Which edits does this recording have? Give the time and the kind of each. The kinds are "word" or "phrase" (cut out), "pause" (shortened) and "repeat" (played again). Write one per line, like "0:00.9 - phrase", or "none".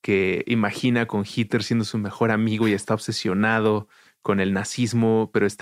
none